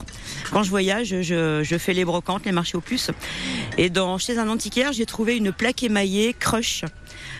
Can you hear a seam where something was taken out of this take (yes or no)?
no